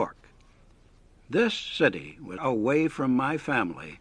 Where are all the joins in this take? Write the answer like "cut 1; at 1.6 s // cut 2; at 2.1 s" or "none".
cut 1; at 2.4 s